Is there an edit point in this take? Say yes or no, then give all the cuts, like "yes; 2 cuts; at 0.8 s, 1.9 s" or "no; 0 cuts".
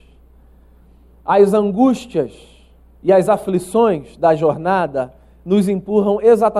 no; 0 cuts